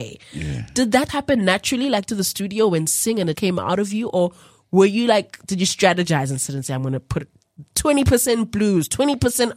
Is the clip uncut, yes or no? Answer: no